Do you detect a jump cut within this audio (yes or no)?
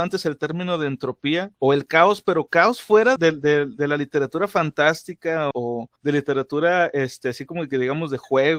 yes